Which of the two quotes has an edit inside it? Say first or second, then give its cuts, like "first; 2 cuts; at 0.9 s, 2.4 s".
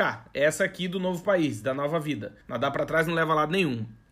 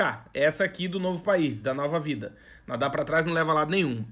first; 1 cut; at 2.4 s